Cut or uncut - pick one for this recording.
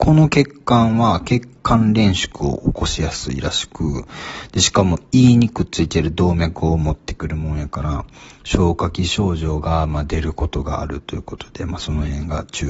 uncut